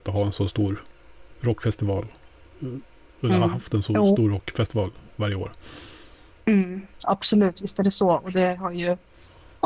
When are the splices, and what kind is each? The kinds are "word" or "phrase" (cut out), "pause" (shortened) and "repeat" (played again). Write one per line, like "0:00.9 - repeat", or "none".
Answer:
none